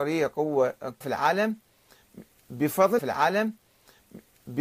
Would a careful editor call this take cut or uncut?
cut